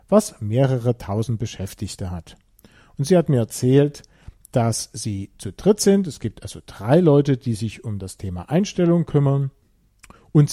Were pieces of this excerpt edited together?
no; 0 cuts

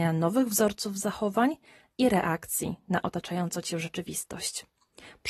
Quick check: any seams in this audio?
no; 0 cuts

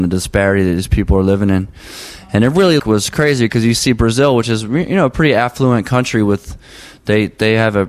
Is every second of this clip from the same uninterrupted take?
no; 1 cut; at 2.8 s

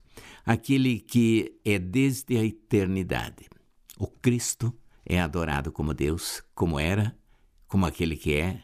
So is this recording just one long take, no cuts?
yes; 0 cuts

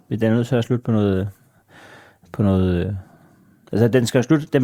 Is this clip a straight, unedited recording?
yes; 0 cuts

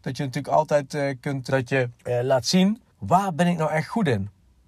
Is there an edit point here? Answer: yes; 3 cuts; at 1.5 s, 2.0 s, 2.9 s

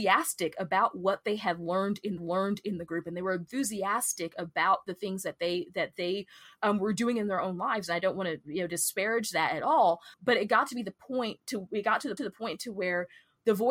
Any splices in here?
yes; 3 cuts; at 2.2 s, 10.1 s, 12.2 s

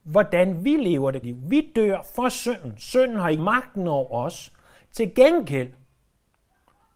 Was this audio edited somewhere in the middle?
yes; 2 cuts; at 1.2 s, 3.4 s

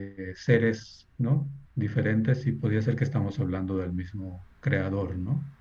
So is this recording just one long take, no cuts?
no; 2 cuts; at 1.7 s, 4.5 s

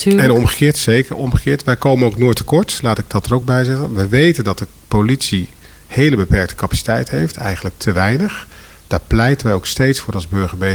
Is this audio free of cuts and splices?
yes; 0 cuts

